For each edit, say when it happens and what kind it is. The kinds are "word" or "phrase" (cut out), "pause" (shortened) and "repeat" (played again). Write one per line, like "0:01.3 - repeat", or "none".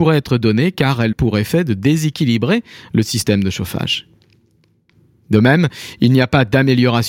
0:01.1 - word